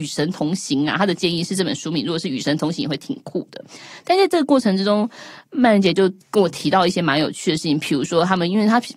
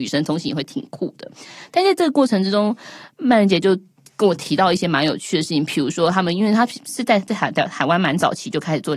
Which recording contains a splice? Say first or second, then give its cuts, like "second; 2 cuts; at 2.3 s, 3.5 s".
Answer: first; 1 cut; at 6.2 s